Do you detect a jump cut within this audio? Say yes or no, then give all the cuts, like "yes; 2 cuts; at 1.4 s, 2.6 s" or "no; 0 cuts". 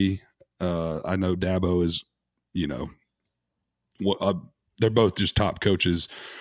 no; 0 cuts